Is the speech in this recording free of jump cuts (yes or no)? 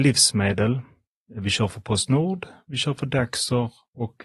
yes